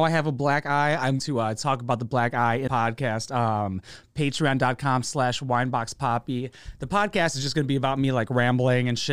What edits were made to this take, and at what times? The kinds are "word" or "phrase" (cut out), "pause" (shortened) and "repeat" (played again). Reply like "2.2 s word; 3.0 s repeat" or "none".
1.2 s word; 2.7 s phrase